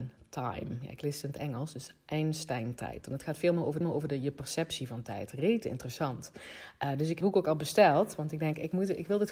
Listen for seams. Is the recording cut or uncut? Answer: cut